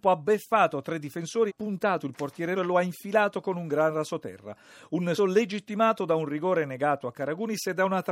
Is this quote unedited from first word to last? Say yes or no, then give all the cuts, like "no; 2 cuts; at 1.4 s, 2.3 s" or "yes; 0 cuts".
no; 3 cuts; at 1.5 s, 2.6 s, 5.2 s